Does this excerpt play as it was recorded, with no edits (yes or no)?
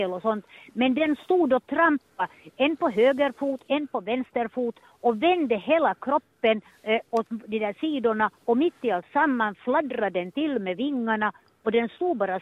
no